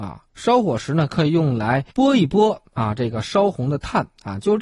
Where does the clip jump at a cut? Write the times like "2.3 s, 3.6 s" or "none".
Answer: 1.9 s